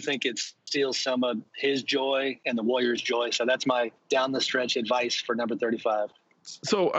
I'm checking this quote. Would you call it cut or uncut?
cut